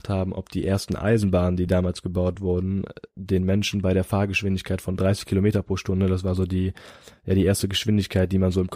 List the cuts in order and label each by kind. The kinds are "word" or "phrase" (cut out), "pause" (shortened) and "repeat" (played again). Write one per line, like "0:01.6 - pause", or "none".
none